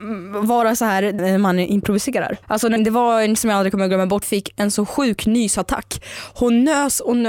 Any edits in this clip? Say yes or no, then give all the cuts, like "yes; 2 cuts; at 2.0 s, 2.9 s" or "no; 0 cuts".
yes; 5 cuts; at 1.2 s, 2.4 s, 2.8 s, 3.4 s, 4.2 s